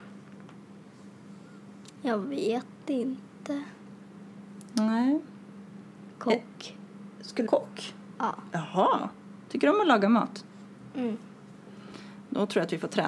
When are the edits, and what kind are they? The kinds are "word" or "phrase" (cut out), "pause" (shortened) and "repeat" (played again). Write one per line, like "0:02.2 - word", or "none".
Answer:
0:07.5 - phrase